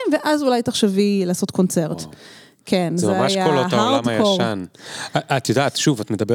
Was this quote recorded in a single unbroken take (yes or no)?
yes